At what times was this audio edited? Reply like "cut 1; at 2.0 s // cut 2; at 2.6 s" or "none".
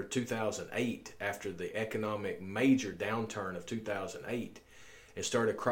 none